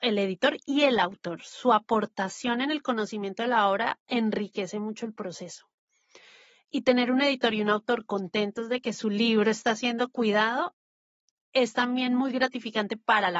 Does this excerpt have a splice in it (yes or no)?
no